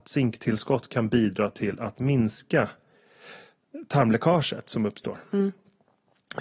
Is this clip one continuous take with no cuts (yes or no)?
yes